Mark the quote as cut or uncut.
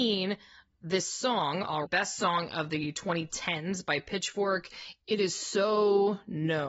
cut